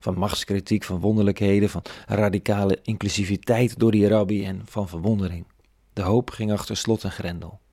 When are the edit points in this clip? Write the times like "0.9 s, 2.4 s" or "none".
none